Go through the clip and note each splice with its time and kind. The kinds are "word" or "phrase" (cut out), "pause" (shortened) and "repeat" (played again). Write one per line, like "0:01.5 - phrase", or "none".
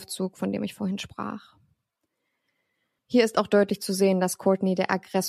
none